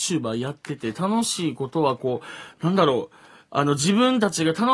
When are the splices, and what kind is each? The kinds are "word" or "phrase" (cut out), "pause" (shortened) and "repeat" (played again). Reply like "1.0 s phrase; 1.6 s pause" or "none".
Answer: none